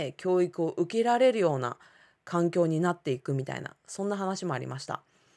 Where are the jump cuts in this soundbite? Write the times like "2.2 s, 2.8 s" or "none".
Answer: none

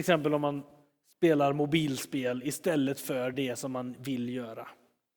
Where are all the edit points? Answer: none

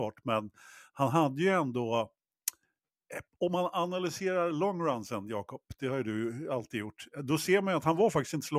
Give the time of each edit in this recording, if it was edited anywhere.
3.3 s

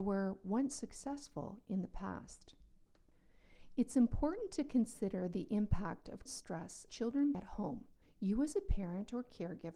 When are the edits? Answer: 6.3 s, 6.9 s, 7.3 s, 8.0 s

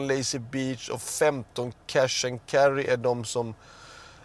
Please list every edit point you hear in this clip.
none

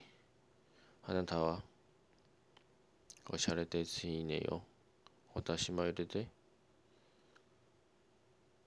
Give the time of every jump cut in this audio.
none

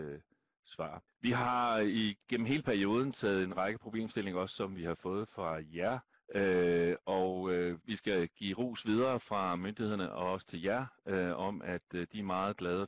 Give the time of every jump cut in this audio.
1.1 s, 6.1 s, 7.8 s

